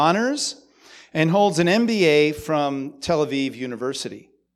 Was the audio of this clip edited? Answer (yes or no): no